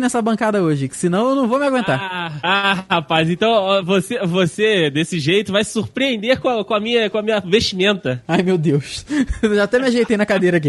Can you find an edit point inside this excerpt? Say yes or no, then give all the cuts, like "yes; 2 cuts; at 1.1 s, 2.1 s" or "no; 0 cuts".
no; 0 cuts